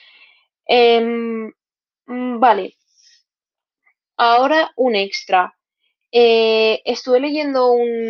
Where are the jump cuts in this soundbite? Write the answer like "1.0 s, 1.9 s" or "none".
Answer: none